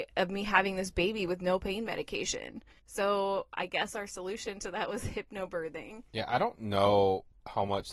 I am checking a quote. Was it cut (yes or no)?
no